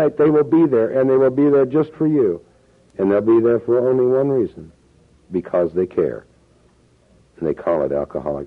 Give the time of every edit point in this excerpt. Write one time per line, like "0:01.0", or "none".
none